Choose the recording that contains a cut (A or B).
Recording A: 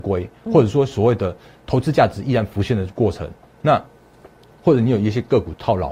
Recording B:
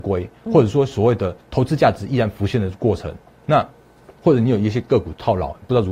B